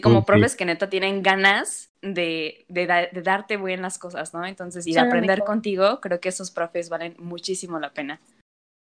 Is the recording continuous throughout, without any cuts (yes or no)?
yes